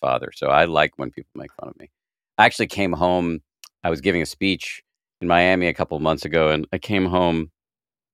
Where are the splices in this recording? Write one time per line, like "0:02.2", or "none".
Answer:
none